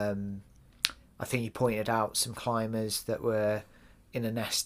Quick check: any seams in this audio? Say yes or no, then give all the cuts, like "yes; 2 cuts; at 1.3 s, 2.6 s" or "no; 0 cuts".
no; 0 cuts